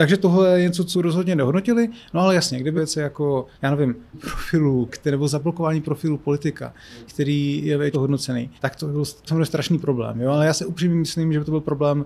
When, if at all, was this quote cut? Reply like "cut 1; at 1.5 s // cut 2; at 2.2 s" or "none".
cut 1; at 0.9 s // cut 2; at 2.8 s // cut 3; at 3.5 s // cut 4; at 4.1 s // cut 5; at 4.9 s // cut 6; at 7.1 s // cut 7; at 7.9 s // cut 8; at 8.6 s // cut 9; at 9.3 s